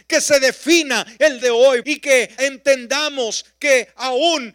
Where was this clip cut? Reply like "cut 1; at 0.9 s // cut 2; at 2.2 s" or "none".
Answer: cut 1; at 1.4 s // cut 2; at 1.8 s // cut 3; at 2.4 s